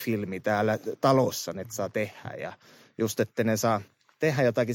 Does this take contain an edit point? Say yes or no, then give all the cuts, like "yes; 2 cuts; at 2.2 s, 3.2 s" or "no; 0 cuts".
no; 0 cuts